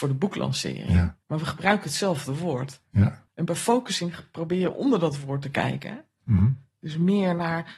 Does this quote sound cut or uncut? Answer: cut